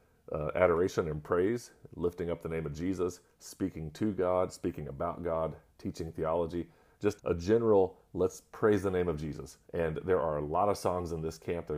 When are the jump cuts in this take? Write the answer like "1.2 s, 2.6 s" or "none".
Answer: 7.2 s, 9.6 s